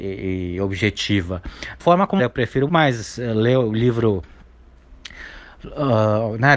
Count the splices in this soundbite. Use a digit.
3